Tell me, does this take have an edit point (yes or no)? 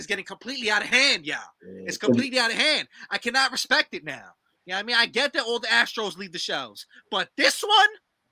no